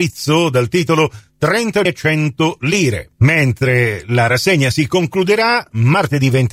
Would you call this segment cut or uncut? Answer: cut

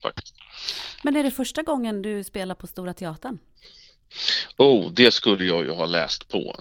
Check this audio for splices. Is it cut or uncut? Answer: uncut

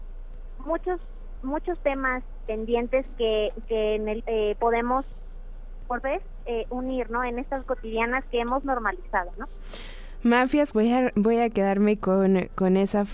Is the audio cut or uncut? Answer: cut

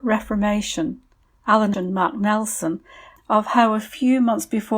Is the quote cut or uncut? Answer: cut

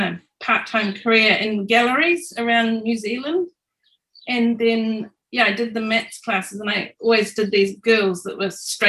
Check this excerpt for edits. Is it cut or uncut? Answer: uncut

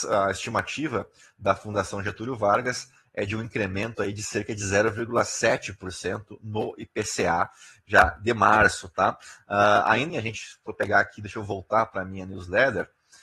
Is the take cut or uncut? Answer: cut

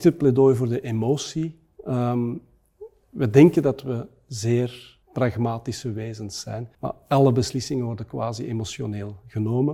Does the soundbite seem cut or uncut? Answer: cut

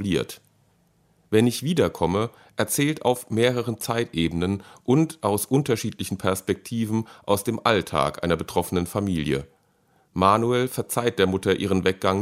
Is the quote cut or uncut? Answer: uncut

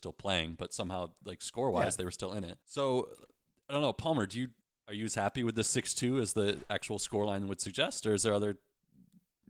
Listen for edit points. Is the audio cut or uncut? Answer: cut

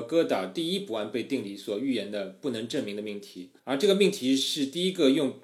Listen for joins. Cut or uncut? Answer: cut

